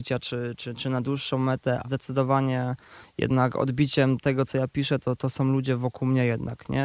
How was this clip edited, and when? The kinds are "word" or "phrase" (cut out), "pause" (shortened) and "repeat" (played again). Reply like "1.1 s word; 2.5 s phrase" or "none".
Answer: 1.8 s word; 5.0 s word